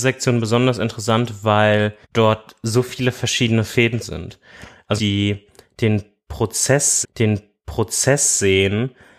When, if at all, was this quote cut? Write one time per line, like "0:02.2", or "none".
0:02.0
0:04.0
0:05.0
0:07.0